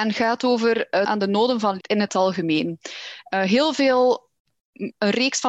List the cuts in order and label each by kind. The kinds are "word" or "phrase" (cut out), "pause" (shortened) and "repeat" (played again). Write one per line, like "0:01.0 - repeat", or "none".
0:01.0 - word
0:01.8 - word